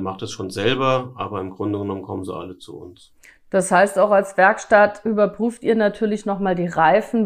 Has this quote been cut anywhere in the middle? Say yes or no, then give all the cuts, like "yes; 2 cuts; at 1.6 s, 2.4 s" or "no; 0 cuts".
no; 0 cuts